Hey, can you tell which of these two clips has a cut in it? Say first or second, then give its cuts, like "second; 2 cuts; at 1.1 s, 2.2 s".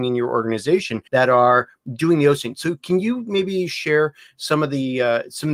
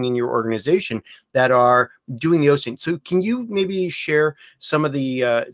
first; 1 cut; at 1.1 s